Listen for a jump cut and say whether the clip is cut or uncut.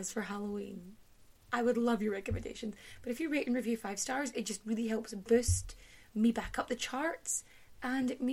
uncut